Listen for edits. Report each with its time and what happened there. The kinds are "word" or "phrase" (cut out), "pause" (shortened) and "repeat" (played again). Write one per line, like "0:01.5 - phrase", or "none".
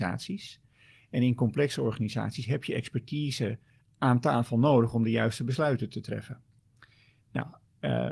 none

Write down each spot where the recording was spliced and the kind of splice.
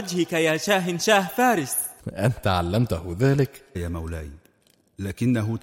0:02.0 - pause
0:03.7 - word

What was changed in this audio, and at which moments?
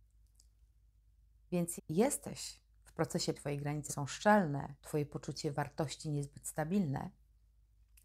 0:01.8 - word
0:03.3 - phrase
0:03.9 - word
0:04.8 - pause

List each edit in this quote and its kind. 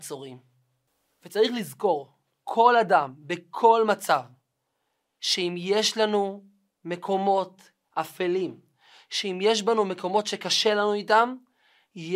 none

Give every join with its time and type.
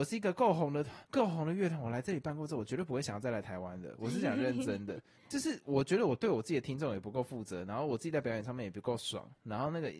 0:01.1 - pause
0:05.2 - pause

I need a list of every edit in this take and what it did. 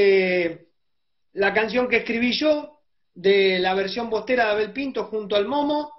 none

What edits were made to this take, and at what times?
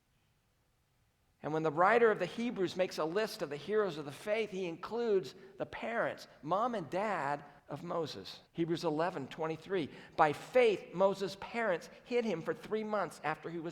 0:07.6 - pause
0:08.5 - pause

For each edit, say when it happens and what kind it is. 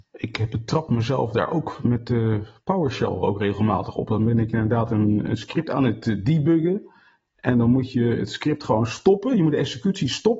none

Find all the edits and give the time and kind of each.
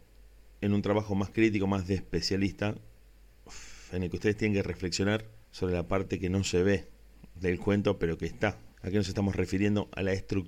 0:05.4 - pause
0:08.7 - pause

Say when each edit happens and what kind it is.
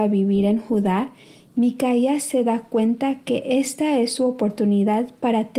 none

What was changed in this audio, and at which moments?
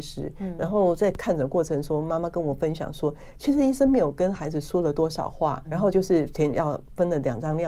0:05.6 - word

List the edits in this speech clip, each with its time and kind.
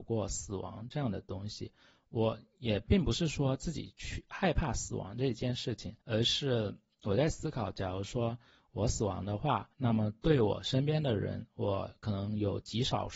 0:06.0 - pause
0:09.7 - pause

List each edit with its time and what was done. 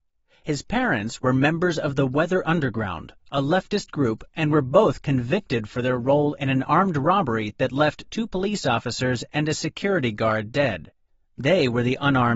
none

